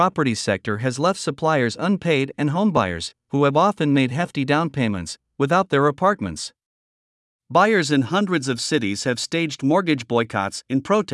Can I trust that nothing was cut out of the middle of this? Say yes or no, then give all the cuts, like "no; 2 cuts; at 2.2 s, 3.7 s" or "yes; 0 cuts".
yes; 0 cuts